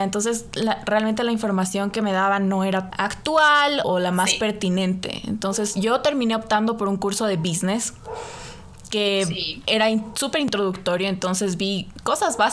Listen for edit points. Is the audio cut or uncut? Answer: cut